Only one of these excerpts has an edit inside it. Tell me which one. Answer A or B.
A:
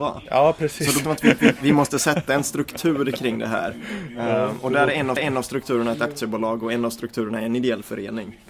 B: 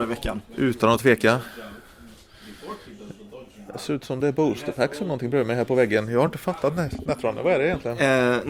A